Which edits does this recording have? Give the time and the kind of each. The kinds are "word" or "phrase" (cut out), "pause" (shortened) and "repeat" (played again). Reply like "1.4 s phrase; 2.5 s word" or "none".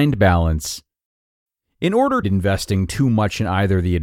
2.2 s phrase